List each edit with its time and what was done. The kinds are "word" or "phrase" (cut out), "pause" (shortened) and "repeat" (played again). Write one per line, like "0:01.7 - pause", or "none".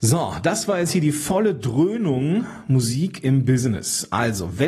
none